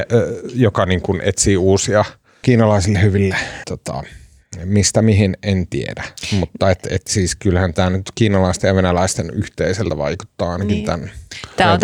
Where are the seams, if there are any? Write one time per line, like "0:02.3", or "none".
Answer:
0:02.4
0:03.6